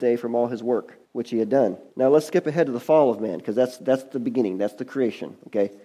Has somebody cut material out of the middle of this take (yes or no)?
yes